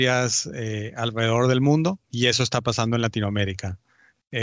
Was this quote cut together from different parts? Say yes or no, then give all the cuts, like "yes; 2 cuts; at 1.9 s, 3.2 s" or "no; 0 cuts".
yes; 1 cut; at 2.0 s